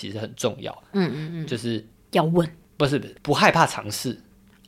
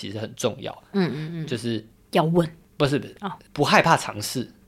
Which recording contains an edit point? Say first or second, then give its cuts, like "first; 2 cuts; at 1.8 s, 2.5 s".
first; 1 cut; at 3.2 s